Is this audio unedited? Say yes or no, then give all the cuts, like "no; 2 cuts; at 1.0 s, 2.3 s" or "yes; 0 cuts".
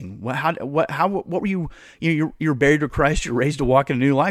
yes; 0 cuts